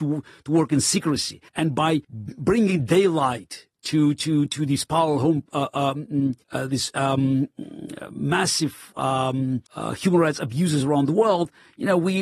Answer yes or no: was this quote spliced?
yes